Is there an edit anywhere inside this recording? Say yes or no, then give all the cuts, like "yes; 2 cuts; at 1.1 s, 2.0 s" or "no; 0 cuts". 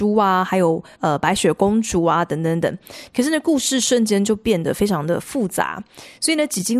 yes; 1 cut; at 0.9 s